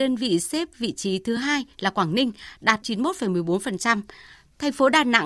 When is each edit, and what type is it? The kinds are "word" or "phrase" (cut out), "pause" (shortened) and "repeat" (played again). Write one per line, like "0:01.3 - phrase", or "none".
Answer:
none